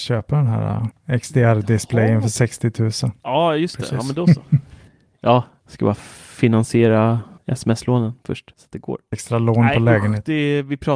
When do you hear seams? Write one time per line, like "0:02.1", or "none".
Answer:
0:07.4